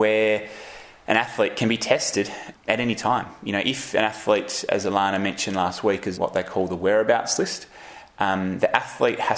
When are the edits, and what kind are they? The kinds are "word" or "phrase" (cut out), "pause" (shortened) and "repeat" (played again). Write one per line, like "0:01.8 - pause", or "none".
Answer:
0:02.5 - word
0:06.1 - word